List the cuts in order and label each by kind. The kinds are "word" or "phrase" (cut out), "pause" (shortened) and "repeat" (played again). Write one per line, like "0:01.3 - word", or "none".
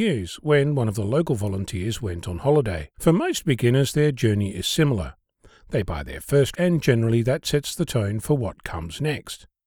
0:02.9 - pause
0:06.5 - word

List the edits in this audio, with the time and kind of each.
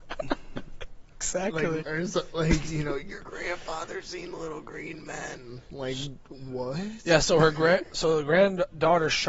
0:01.8 - word

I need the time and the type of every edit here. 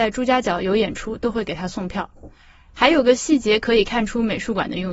none

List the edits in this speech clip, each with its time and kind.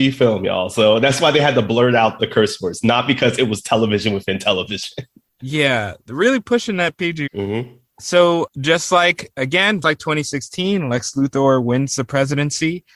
0:02.2 - word
0:07.3 - word
0:08.5 - word
0:09.8 - word

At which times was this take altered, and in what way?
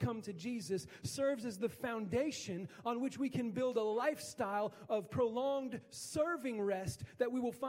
none

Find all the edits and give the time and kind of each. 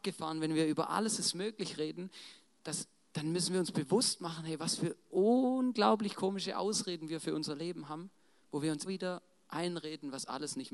0:08.9 - word

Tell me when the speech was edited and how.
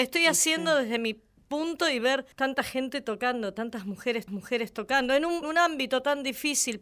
0:02.3 - pause
0:04.3 - repeat
0:05.4 - word

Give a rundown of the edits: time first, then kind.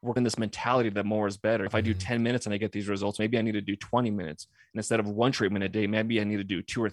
none

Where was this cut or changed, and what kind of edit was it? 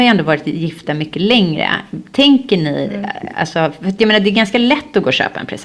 none

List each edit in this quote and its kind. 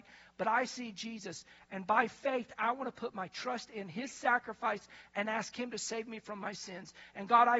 none

